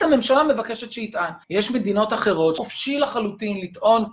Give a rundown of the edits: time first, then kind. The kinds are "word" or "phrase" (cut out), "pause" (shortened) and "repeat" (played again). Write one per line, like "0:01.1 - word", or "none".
0:01.4 - pause
0:02.6 - phrase